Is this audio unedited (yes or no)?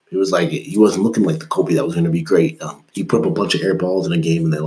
no